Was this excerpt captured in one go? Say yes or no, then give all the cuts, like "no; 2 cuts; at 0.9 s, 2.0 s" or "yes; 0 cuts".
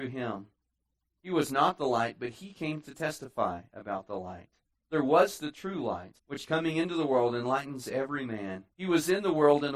no; 3 cuts; at 4.7 s, 6.2 s, 8.7 s